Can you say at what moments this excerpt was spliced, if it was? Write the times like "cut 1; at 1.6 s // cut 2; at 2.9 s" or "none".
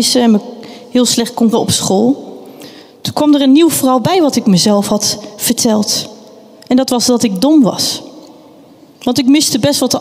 cut 1; at 1.5 s